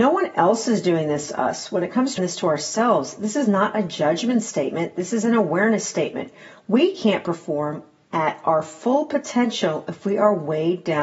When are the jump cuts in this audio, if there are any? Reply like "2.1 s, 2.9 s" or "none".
2.2 s